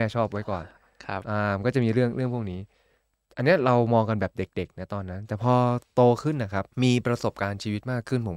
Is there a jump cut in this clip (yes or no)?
yes